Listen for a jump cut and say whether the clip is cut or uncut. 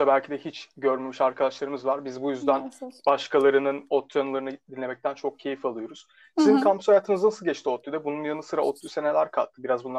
uncut